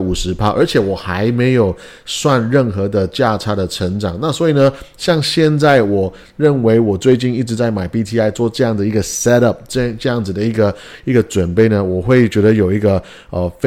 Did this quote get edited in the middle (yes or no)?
no